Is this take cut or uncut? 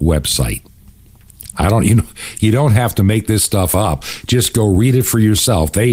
uncut